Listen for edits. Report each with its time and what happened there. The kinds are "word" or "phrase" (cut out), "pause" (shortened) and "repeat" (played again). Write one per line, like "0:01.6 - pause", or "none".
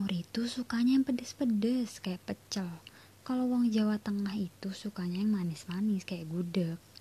none